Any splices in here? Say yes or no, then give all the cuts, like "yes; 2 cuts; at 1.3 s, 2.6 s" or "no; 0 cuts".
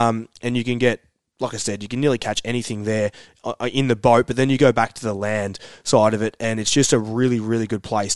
no; 0 cuts